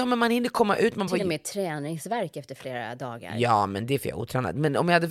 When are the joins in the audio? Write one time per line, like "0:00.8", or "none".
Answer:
0:01.1